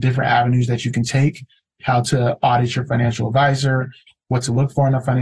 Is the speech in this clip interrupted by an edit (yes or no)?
no